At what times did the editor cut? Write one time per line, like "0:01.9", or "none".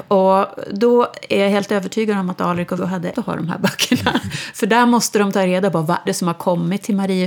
0:02.8
0:03.1
0:06.1